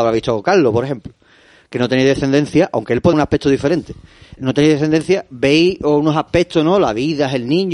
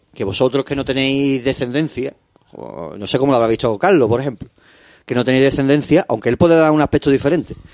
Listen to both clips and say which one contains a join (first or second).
first